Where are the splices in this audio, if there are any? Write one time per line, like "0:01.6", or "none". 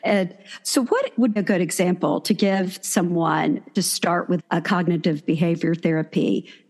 0:01.4
0:03.8
0:04.4